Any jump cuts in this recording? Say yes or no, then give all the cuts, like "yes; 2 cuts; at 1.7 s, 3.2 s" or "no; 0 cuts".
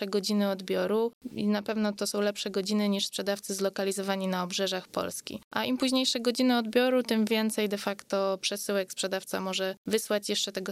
no; 0 cuts